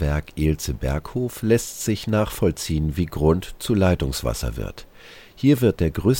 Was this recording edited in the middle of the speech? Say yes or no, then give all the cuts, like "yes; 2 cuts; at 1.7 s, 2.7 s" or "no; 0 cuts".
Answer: no; 0 cuts